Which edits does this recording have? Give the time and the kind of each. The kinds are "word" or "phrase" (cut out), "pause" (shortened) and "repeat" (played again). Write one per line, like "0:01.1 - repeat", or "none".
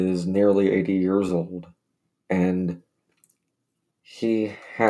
none